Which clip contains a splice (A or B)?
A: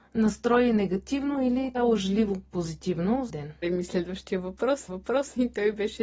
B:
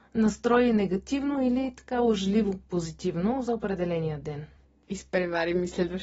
A